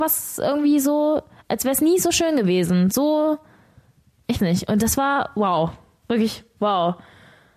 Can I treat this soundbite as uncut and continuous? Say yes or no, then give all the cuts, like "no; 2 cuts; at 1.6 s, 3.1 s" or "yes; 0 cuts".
no; 1 cut; at 4.4 s